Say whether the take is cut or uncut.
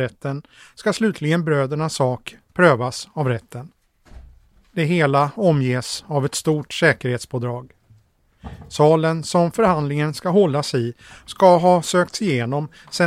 uncut